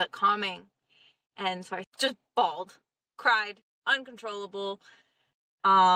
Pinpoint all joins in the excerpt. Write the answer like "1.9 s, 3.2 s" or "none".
1.8 s, 3.7 s